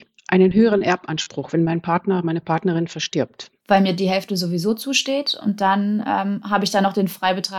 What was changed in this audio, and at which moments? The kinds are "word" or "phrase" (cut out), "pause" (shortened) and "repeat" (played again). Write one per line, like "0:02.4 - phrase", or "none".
none

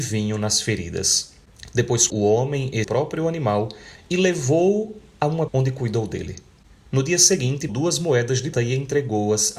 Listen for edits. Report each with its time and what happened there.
0:02.1 - word
0:02.8 - word
0:05.5 - word
0:07.7 - word
0:08.5 - word

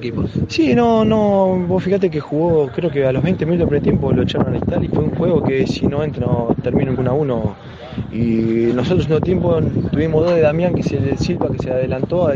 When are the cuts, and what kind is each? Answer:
0:04.9 - word
0:06.2 - phrase
0:07.0 - word

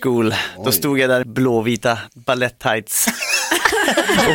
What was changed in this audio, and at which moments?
0:01.2 - word

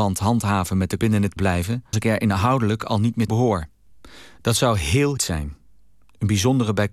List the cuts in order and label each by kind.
0:01.0 - phrase
0:01.4 - word
0:01.9 - word
0:03.3 - word
0:05.2 - word

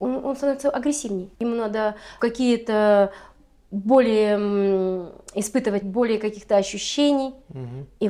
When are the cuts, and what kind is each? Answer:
0:01.4 - pause
0:02.2 - word
0:05.8 - word

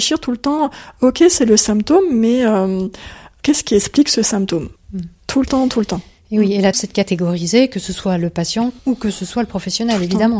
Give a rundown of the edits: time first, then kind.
0:04.8 - word
0:06.7 - word
0:08.8 - pause

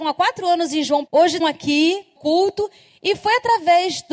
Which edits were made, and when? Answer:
0:01.1 - word
0:01.4 - word
0:02.2 - word

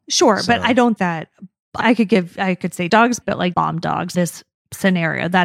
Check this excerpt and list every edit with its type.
0:01.0 - word
0:01.8 - word
0:02.9 - word
0:03.2 - word
0:03.5 - word
0:04.1 - word

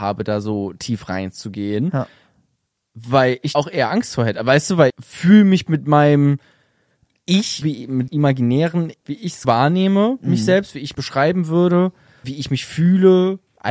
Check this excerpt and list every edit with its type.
0:03.5 - word
0:04.9 - word
0:07.6 - word
0:08.1 - word
0:09.0 - word
0:09.4 - word
0:10.9 - word
0:12.2 - word

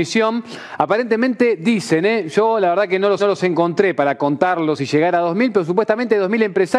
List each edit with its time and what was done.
0:03.2 - repeat

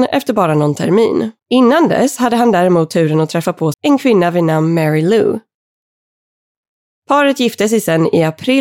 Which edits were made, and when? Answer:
0:01.4 - pause
0:03.7 - phrase

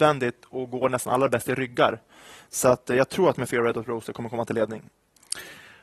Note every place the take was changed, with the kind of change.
none

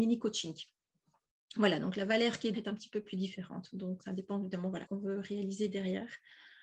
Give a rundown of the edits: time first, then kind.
0:02.5 - word
0:04.0 - word
0:04.9 - word

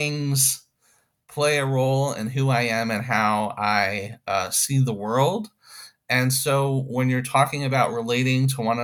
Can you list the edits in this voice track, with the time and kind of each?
none

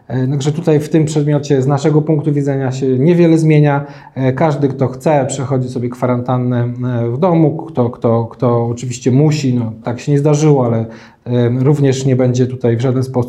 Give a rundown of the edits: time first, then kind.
0:09.8 - word

